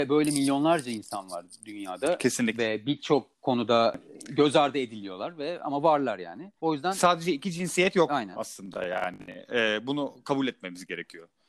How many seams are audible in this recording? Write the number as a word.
two